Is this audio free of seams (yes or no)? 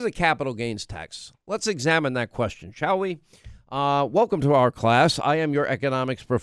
yes